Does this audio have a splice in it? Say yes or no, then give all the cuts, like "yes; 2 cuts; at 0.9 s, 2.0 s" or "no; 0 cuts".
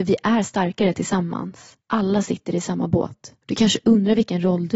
yes; 2 cuts; at 1.8 s, 3.4 s